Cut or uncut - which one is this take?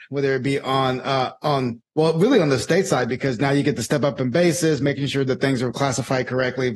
uncut